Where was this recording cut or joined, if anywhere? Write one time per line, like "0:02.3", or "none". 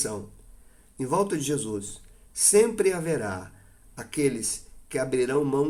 none